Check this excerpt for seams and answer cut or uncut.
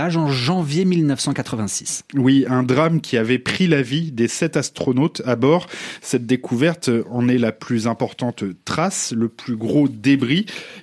uncut